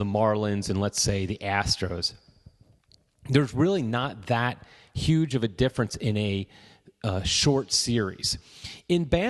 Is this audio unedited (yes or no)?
yes